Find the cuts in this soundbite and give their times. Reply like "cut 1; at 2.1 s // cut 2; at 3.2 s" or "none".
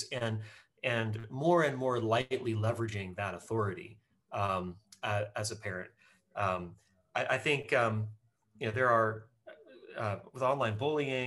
none